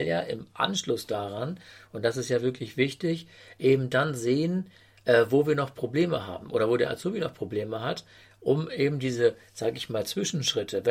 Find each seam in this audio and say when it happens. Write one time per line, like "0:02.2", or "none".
none